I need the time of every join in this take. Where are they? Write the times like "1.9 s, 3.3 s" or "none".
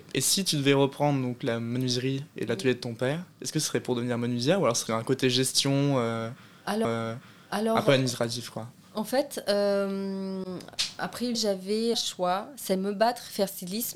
3.3 s, 4.9 s, 6.8 s, 11.3 s, 11.9 s